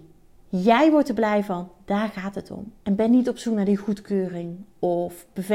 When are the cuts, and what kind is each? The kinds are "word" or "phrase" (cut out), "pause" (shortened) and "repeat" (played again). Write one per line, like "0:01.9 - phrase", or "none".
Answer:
0:02.8 - pause